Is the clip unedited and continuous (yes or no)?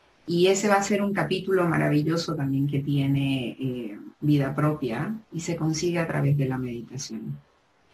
no